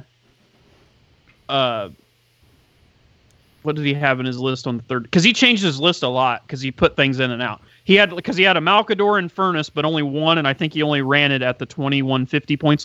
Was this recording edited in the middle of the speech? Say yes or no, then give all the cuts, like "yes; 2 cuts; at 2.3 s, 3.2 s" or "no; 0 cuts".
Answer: no; 0 cuts